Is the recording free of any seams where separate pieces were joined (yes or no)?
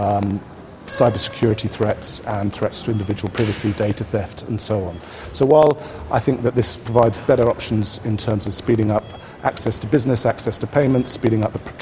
yes